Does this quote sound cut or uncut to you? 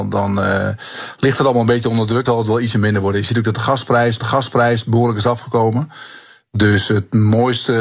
cut